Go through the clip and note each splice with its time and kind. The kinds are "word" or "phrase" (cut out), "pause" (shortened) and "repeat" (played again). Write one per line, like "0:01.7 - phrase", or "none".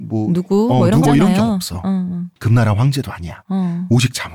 0:01.0 - word
0:02.4 - pause